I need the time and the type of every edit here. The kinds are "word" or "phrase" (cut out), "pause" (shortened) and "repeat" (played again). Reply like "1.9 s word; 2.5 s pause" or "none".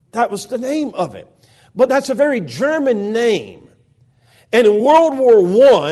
none